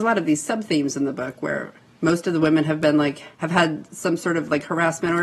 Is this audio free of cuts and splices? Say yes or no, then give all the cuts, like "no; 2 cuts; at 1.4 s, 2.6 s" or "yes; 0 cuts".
no; 2 cuts; at 1.9 s, 3.3 s